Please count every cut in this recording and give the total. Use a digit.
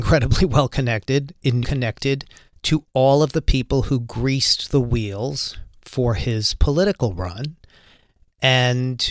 1